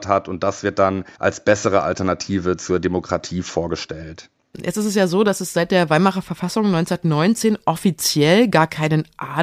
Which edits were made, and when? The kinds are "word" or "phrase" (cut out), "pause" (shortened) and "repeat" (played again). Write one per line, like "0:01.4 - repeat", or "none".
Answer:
0:01.1 - pause